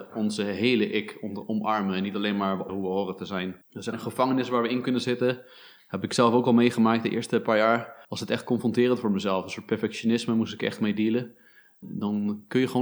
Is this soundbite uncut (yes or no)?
no